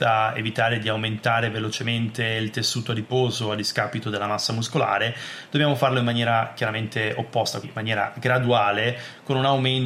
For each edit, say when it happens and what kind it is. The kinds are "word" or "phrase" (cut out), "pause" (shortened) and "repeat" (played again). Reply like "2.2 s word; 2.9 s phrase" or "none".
7.6 s word